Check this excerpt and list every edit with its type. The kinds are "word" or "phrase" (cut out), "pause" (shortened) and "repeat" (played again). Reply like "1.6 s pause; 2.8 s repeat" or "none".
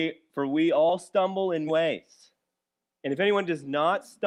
1.7 s word